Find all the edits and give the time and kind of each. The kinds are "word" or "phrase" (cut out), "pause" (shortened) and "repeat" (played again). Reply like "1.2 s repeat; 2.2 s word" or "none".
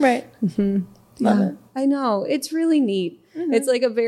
none